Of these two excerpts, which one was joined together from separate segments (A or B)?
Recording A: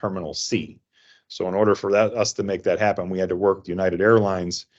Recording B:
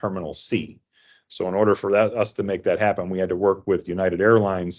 A